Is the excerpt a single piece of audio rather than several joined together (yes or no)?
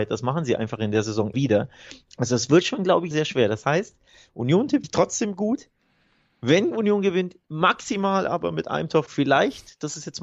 no